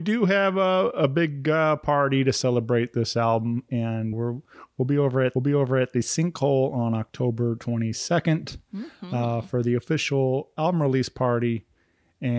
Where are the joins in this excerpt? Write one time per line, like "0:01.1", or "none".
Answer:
0:04.1
0:05.4